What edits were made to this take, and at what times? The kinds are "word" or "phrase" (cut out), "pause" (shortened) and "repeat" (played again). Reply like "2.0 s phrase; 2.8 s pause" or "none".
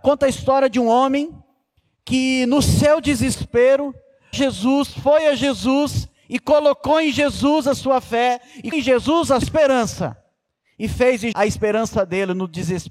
4.3 s word; 8.7 s word; 9.4 s word; 11.3 s word